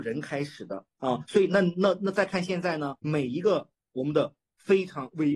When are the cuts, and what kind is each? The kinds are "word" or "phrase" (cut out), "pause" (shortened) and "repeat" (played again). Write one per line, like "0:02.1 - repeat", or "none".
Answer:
0:00.9 - pause
0:03.0 - pause